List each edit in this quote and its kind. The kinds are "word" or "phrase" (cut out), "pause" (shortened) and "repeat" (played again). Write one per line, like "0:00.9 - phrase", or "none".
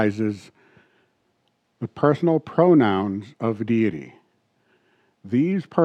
none